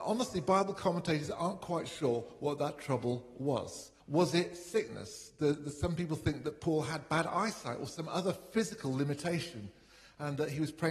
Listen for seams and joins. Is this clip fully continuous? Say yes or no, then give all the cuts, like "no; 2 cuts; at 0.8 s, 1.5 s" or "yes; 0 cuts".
no; 1 cut; at 4.0 s